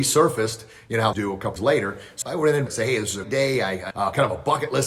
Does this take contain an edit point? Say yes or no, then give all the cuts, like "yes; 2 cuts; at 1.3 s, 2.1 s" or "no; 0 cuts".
yes; 6 cuts; at 1.1 s, 1.6 s, 2.2 s, 2.7 s, 3.2 s, 3.9 s